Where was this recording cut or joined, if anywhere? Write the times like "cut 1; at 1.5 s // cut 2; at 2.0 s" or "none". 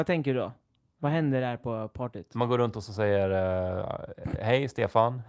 none